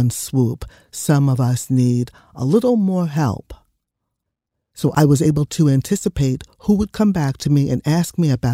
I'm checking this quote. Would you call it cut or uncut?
uncut